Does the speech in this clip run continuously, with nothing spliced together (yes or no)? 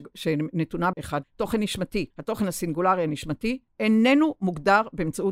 no